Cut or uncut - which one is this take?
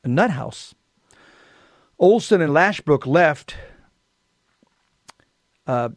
uncut